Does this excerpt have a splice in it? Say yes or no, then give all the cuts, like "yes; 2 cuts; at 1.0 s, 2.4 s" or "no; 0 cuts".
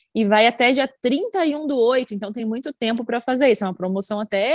no; 0 cuts